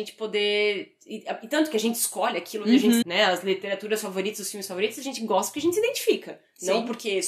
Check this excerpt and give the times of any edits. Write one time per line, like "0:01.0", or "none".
0:03.0